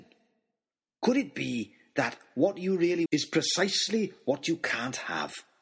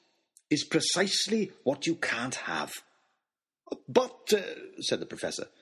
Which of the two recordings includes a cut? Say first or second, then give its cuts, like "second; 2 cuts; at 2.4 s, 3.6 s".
first; 1 cut; at 3.1 s